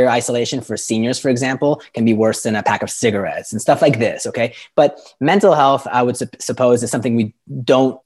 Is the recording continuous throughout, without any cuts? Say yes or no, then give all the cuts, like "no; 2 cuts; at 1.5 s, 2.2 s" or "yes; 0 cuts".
yes; 0 cuts